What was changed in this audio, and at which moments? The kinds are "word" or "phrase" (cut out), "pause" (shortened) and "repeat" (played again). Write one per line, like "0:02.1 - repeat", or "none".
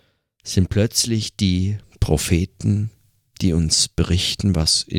none

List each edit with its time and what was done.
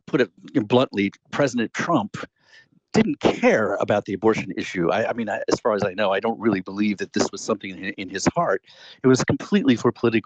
none

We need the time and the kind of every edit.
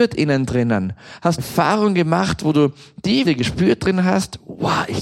0:01.4 - phrase
0:03.2 - word

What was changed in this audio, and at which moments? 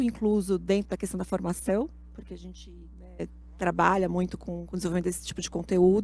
none

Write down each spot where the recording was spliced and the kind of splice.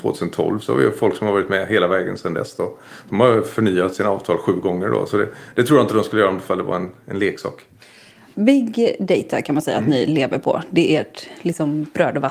none

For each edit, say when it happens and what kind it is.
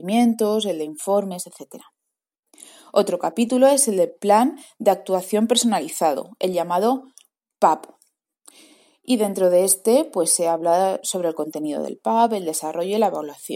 none

